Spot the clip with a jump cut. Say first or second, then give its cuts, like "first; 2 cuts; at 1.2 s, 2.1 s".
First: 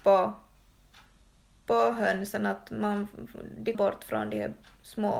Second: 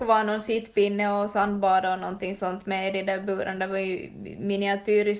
first; 1 cut; at 3.7 s